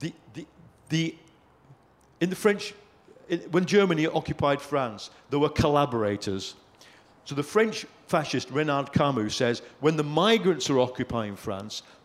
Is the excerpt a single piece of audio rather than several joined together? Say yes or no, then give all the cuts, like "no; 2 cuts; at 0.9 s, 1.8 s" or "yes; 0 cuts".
yes; 0 cuts